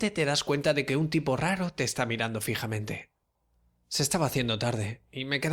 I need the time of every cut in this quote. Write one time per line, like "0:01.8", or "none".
none